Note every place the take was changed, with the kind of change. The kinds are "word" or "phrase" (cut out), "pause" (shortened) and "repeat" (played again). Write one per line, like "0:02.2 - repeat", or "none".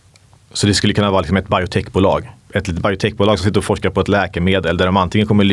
0:02.4 - word